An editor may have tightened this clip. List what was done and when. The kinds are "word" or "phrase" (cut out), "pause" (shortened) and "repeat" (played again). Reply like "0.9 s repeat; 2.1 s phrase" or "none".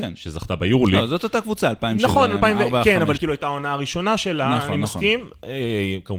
3.2 s word